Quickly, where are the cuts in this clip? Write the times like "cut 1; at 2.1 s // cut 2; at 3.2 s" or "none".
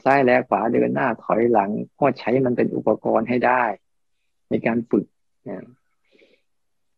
none